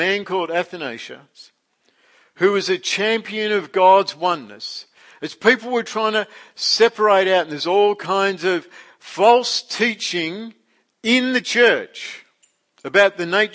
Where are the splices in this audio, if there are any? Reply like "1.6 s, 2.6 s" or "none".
none